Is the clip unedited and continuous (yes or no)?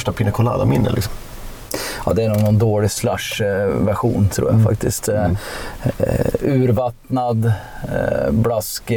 yes